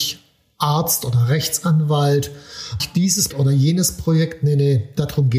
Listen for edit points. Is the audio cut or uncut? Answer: cut